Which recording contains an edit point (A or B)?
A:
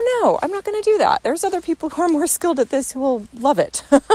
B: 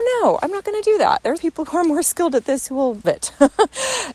B